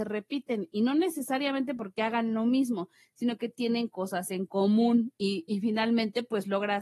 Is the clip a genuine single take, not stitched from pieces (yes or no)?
yes